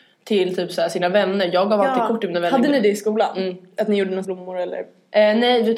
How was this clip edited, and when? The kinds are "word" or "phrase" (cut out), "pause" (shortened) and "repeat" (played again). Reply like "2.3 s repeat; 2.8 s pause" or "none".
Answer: 4.2 s phrase